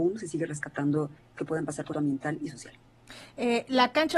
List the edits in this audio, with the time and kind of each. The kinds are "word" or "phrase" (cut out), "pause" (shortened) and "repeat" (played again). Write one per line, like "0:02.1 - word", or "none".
0:01.4 - word
0:01.9 - word